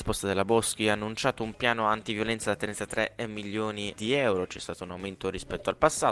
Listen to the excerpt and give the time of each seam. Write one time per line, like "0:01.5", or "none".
0:04.0